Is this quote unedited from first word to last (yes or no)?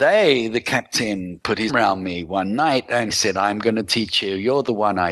no